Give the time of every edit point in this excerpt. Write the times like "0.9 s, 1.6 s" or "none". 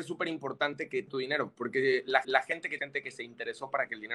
1.1 s, 2.2 s, 2.8 s